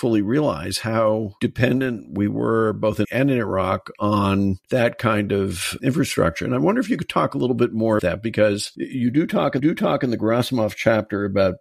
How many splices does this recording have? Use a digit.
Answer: 3